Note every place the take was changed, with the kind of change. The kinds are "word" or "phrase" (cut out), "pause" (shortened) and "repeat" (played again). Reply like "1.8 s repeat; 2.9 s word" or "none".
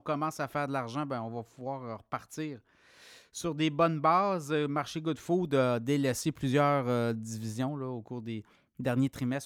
none